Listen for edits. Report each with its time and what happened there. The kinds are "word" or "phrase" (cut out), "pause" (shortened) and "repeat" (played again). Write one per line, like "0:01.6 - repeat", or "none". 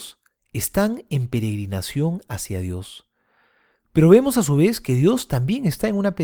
none